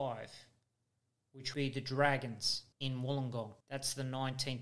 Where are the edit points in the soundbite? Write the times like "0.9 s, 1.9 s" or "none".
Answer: 1.5 s, 2.7 s, 3.6 s